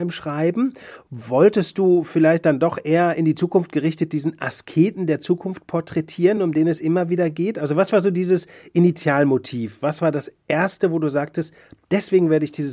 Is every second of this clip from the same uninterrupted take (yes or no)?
yes